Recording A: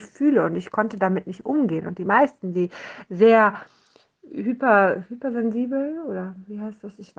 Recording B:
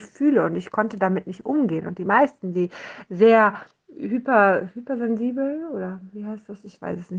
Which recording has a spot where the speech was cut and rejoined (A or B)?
B